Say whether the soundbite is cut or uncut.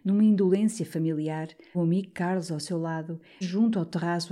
cut